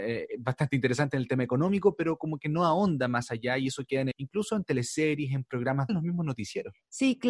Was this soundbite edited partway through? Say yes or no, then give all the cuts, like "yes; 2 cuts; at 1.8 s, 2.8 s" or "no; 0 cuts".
yes; 2 cuts; at 4.1 s, 5.9 s